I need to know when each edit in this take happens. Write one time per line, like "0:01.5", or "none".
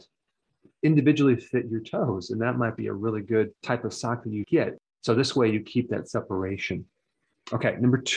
0:03.6
0:04.4